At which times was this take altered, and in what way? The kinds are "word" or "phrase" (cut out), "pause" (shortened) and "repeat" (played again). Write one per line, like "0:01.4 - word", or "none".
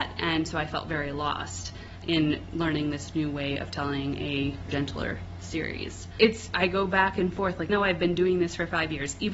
0:04.7 - word
0:07.7 - word